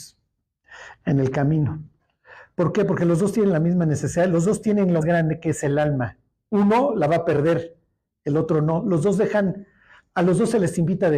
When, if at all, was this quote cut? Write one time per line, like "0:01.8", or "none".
0:05.0